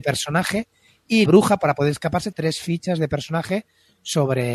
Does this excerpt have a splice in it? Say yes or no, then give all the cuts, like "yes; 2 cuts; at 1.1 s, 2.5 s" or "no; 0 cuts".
yes; 2 cuts; at 1.3 s, 2.3 s